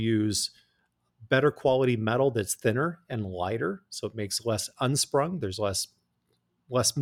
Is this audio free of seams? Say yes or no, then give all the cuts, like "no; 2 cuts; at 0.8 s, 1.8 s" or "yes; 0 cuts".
yes; 0 cuts